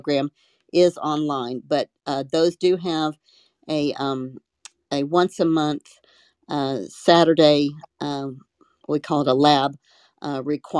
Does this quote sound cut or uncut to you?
uncut